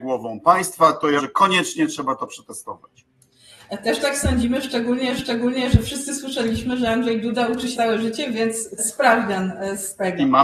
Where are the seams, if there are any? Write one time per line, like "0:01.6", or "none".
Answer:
0:01.2
0:05.2
0:07.7
0:08.8